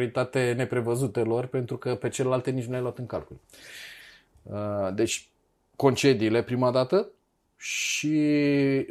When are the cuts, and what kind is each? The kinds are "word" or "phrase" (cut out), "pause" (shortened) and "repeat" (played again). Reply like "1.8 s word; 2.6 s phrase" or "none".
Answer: none